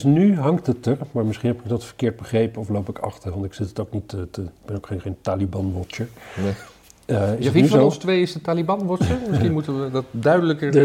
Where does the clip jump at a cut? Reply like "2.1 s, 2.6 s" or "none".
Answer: none